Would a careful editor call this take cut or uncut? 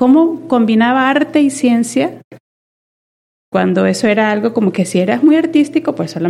uncut